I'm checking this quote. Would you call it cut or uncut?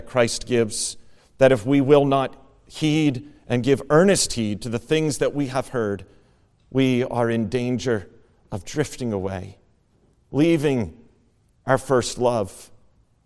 uncut